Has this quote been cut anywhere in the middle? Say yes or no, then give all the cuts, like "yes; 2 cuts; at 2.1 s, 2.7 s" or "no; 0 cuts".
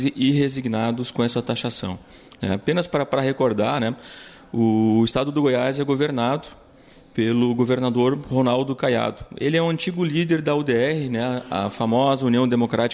no; 0 cuts